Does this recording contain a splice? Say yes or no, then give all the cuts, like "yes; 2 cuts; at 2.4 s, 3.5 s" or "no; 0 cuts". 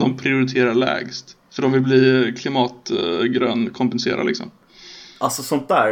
yes; 1 cut; at 1.4 s